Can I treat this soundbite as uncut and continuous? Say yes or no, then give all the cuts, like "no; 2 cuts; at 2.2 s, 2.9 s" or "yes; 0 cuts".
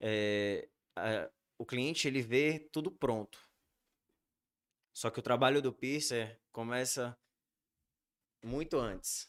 yes; 0 cuts